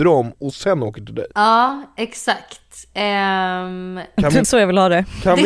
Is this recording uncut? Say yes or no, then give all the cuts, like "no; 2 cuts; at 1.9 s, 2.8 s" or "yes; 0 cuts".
no; 2 cuts; at 1.3 s, 4.4 s